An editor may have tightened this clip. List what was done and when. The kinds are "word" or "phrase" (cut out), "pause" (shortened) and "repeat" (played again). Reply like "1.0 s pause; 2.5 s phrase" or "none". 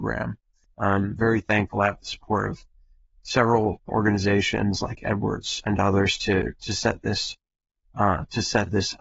none